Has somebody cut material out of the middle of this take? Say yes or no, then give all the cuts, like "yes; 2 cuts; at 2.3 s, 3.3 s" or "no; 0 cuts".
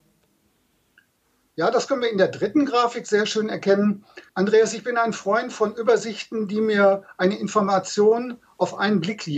yes; 1 cut; at 4.3 s